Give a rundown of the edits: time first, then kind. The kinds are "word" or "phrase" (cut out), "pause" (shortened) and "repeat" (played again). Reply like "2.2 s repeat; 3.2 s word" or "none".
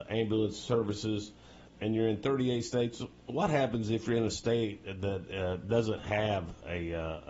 none